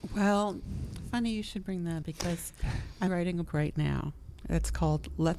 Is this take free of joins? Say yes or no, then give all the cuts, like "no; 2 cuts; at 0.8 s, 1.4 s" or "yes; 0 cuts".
no; 3 cuts; at 2.0 s, 3.1 s, 3.5 s